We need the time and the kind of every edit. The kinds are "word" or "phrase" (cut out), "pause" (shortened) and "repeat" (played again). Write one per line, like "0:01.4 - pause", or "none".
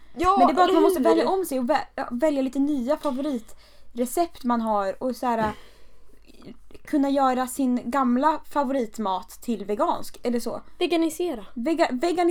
none